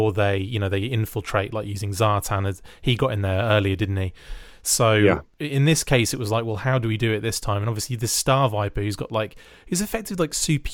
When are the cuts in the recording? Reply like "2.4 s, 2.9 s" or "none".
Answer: none